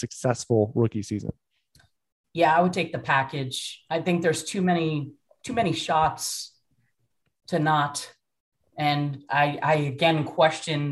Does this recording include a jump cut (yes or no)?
no